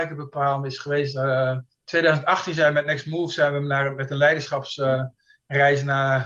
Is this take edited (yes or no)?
yes